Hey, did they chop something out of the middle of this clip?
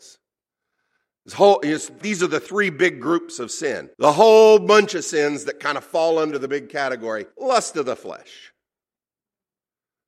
yes; 3 cuts; at 2.0 s, 3.9 s, 7.3 s

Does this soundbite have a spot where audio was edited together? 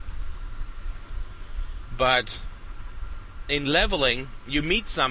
no; 0 cuts

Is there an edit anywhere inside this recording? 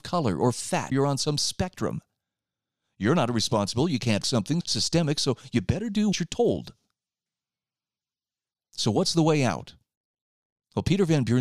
yes; 4 cuts; at 0.9 s, 4.2 s, 4.6 s, 6.1 s

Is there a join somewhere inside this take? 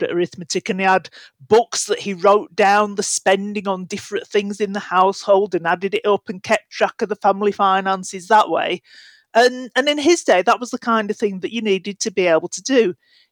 no; 0 cuts

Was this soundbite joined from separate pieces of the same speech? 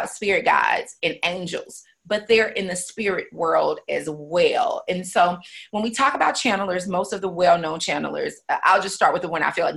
no; 0 cuts

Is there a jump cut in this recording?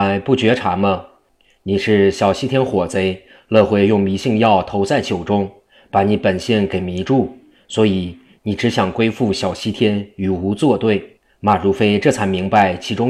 no; 0 cuts

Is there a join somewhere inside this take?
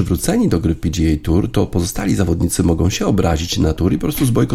no; 0 cuts

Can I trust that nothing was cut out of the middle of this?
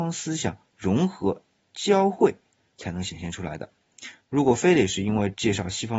yes; 0 cuts

